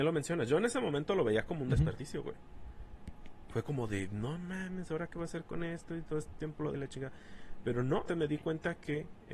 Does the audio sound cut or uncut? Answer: cut